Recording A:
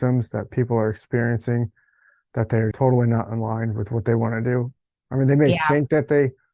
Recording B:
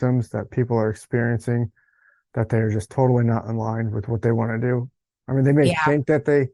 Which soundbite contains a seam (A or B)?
A